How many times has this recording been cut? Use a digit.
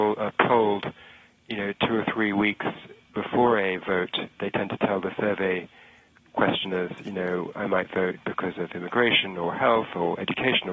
1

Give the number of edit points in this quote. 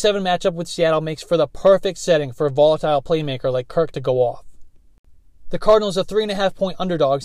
0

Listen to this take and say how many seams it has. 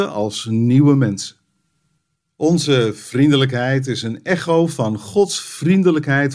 0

